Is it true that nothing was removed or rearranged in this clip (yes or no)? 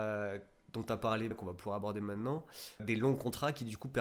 no